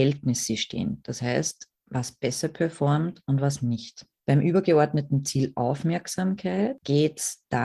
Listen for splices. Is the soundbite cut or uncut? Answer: uncut